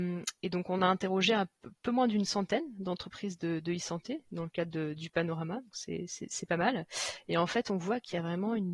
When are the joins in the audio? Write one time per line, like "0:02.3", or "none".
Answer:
none